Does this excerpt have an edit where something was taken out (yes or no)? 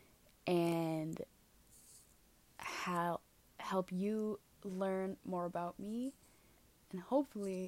no